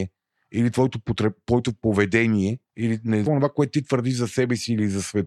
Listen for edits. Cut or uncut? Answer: cut